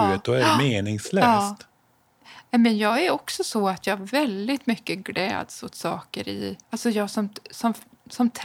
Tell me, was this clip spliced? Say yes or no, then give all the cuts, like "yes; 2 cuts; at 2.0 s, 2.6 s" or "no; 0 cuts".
yes; 1 cut; at 6.6 s